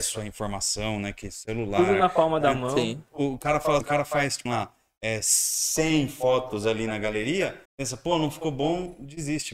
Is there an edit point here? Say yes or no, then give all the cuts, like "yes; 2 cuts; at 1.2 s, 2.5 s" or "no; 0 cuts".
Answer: yes; 3 cuts; at 3.8 s, 4.5 s, 7.6 s